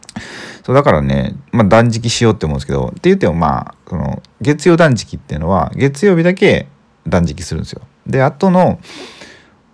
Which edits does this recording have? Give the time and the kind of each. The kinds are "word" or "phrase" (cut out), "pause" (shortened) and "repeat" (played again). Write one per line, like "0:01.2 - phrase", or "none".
0:01.5 - pause